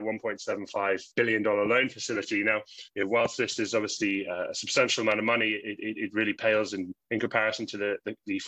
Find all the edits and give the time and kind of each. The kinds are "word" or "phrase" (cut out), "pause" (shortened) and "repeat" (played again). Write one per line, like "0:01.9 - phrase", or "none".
0:01.1 - pause
0:02.9 - pause
0:07.0 - pause